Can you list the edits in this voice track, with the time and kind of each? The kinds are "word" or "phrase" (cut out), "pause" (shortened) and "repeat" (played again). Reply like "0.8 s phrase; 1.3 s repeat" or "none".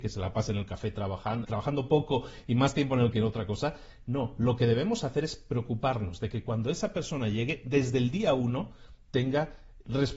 1.4 s word; 3.1 s word